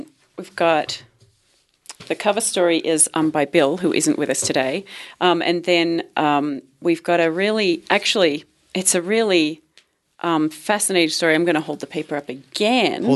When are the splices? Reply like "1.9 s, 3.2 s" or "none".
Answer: none